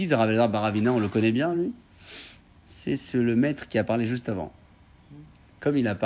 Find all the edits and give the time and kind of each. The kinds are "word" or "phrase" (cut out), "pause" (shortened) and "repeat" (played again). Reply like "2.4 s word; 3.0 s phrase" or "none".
none